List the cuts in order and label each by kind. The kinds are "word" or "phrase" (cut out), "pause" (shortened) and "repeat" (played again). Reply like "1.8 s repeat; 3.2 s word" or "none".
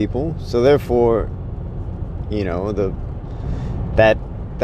none